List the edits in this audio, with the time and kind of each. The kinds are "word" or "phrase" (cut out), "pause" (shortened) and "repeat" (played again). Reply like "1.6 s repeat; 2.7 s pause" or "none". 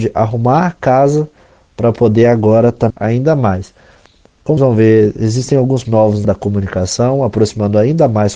2.9 s word; 4.6 s word; 5.8 s word; 6.2 s word

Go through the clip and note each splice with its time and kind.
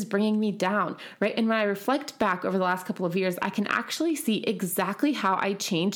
none

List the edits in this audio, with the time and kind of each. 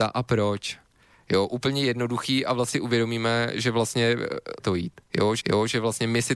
2.7 s phrase; 4.6 s word; 5.4 s repeat

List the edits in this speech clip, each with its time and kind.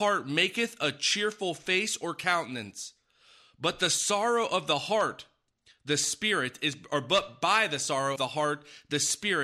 8.2 s word

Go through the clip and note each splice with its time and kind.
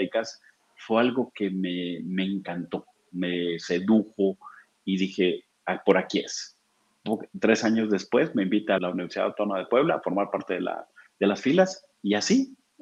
8.8 s word

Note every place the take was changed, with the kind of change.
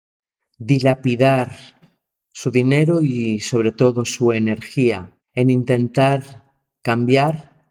5.2 s pause

